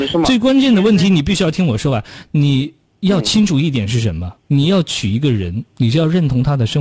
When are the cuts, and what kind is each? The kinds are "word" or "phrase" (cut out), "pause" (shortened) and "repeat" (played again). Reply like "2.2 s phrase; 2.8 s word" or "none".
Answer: 2.9 s pause; 4.4 s pause